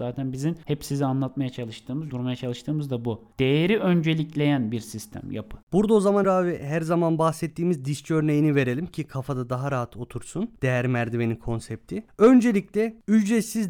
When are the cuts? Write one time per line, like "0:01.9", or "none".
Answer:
0:02.1
0:05.6
0:06.2